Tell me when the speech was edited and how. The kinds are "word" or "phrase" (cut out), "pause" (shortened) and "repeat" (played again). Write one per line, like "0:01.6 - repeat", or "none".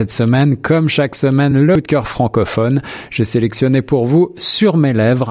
none

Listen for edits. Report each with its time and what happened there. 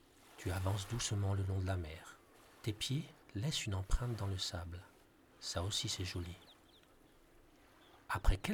0:02.3 - pause
0:03.2 - pause
0:05.0 - pause

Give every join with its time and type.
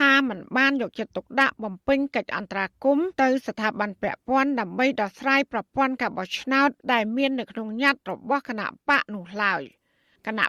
0:03.1 - pause
0:06.8 - pause

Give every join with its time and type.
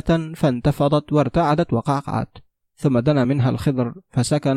none

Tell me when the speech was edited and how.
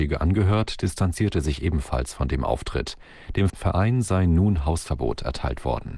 0:03.5 - word

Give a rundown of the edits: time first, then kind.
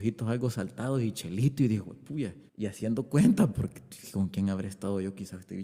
0:02.5 - pause
0:03.5 - word

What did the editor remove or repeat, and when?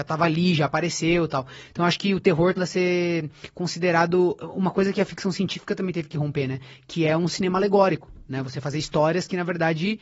0:02.6 - word

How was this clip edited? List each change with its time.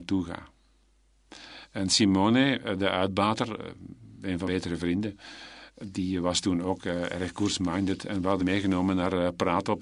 0:04.5 - word
0:08.4 - word

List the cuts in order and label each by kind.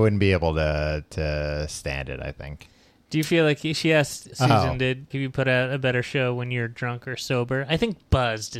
0:04.3 - word
0:05.1 - phrase

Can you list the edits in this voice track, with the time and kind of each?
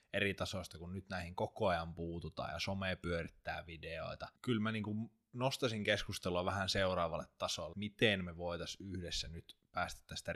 0:04.4 - pause
0:07.7 - word

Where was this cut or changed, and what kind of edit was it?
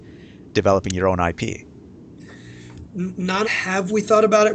0:03.4 - word

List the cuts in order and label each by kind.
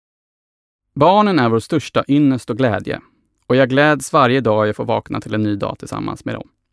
none

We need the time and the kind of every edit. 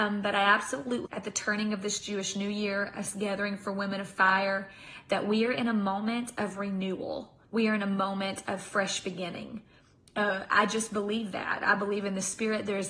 0:01.1 - word
0:07.4 - pause

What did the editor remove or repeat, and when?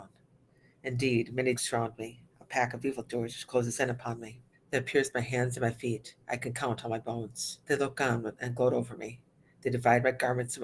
0:01.5 - word
0:04.5 - pause
0:06.2 - pause
0:07.6 - pause

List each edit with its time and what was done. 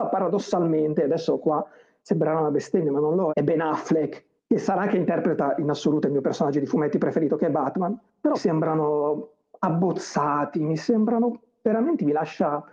0:03.3 - word
0:04.4 - pause
0:08.3 - phrase

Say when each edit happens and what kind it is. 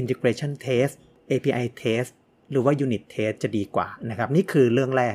none

